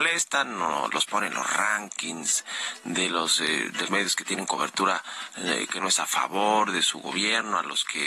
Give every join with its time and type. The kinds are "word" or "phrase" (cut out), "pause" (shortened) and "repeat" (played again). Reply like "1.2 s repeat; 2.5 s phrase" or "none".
3.9 s word